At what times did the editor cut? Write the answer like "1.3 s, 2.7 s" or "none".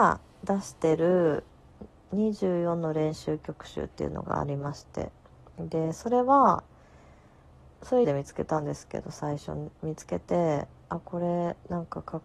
8.0 s